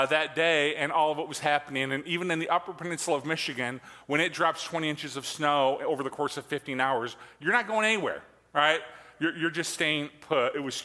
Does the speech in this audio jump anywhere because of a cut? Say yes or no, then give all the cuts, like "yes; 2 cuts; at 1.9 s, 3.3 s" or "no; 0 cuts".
no; 0 cuts